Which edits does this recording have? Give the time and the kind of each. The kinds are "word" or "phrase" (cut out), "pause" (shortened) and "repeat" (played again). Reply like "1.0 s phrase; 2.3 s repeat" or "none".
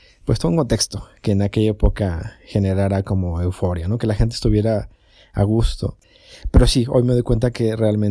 none